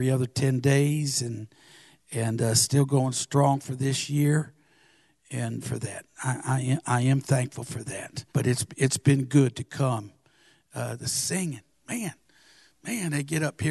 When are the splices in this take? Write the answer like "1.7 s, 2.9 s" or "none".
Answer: 5.6 s, 8.3 s, 11.7 s